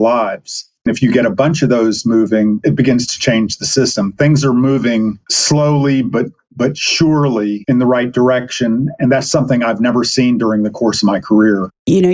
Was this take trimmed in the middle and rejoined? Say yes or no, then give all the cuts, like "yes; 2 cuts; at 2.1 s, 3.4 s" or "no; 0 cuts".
no; 0 cuts